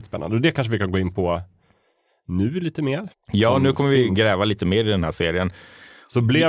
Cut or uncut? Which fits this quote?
uncut